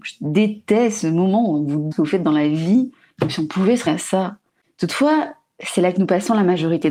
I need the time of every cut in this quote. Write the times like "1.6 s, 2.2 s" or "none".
1.9 s, 3.9 s